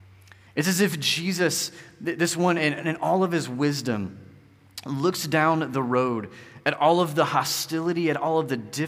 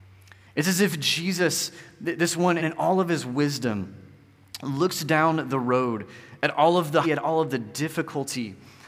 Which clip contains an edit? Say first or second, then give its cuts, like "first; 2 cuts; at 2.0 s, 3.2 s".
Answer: second; 2 cuts; at 2.6 s, 7.0 s